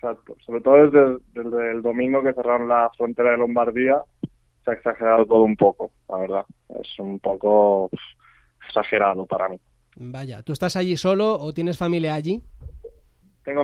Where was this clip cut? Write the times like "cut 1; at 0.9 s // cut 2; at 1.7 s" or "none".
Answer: none